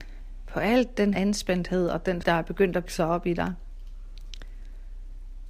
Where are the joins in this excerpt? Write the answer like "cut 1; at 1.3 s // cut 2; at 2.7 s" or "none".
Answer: cut 1; at 1.1 s // cut 2; at 2.2 s // cut 3; at 2.9 s